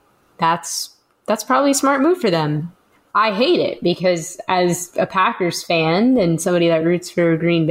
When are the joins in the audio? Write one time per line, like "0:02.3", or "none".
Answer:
none